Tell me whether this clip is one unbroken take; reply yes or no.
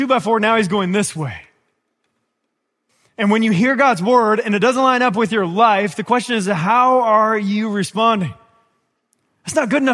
yes